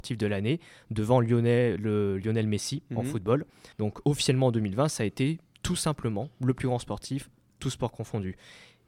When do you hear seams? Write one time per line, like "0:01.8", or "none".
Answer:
0:03.7

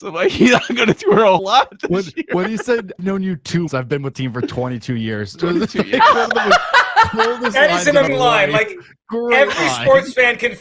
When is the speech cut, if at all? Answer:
0:01.0
0:01.4
0:03.0
0:03.7
0:04.1
0:08.1

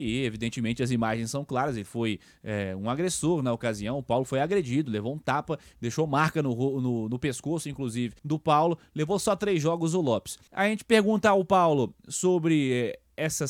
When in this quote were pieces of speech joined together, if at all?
0:08.2
0:10.5

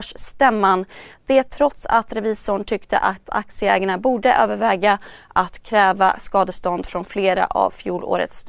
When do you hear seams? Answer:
none

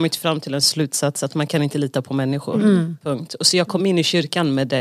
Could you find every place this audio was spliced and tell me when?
none

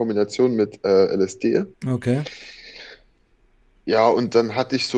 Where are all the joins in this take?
0:01.7

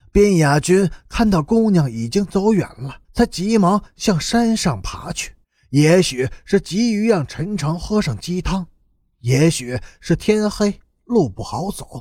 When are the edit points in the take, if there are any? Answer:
0:03.0
0:05.4

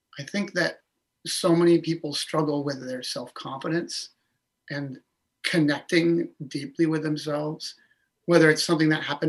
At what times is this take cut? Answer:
none

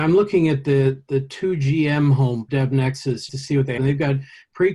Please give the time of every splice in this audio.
0:02.5
0:03.3
0:03.8

